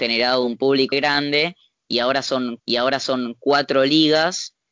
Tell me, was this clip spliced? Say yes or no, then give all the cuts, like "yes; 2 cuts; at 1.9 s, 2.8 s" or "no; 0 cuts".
yes; 2 cuts; at 0.9 s, 2.6 s